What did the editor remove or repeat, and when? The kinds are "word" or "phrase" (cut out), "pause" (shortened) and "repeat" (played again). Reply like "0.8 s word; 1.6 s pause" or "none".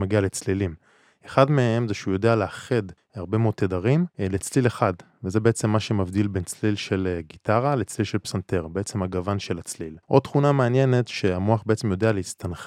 3.0 s pause; 4.1 s pause; 10.0 s pause